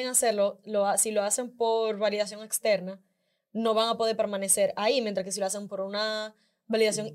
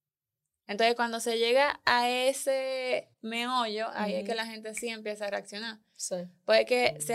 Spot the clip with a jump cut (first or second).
second